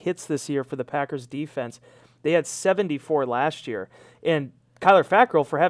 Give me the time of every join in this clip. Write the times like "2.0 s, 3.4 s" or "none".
none